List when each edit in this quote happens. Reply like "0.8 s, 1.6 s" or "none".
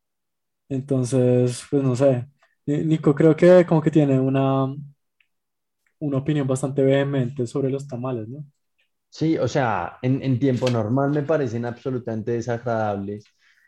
none